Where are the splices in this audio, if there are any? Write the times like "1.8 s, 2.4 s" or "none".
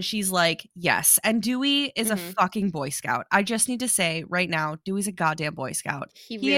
none